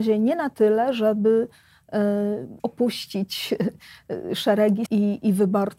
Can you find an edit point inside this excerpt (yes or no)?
yes